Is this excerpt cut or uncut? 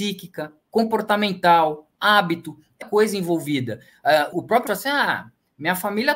cut